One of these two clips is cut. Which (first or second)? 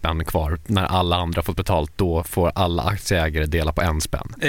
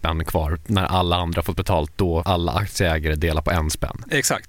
second